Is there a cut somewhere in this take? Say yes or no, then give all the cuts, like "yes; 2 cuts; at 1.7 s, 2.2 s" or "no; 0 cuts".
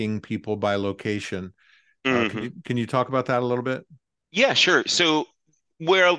no; 0 cuts